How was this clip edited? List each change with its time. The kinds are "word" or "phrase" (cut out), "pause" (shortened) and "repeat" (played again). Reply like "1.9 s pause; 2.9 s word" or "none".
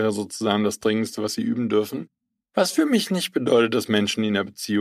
none